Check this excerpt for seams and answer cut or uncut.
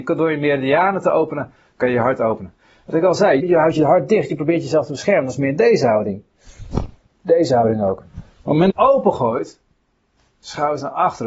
cut